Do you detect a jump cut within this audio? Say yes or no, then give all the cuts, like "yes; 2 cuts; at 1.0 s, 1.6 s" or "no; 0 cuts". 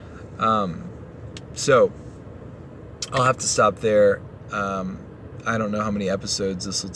no; 0 cuts